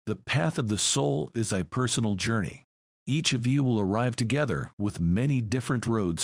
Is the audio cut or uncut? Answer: uncut